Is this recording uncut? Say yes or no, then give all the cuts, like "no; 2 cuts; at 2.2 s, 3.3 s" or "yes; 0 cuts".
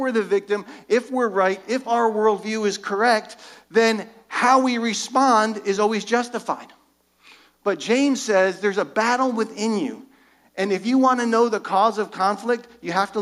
yes; 0 cuts